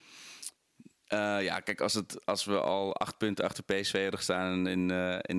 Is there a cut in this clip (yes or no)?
no